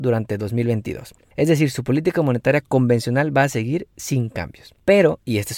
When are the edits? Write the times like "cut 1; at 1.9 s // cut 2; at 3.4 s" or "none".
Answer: none